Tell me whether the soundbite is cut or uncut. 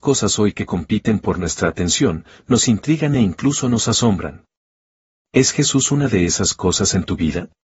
uncut